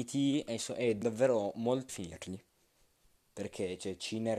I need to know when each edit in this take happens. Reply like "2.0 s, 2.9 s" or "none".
1.0 s, 1.9 s

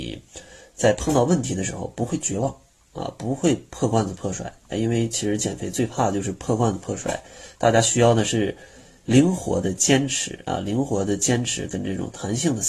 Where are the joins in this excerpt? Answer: none

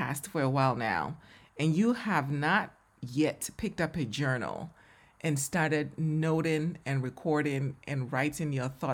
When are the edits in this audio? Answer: none

